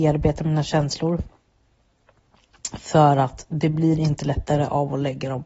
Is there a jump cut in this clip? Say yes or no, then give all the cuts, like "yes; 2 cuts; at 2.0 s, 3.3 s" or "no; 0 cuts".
no; 0 cuts